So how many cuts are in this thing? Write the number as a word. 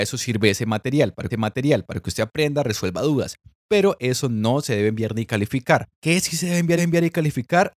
three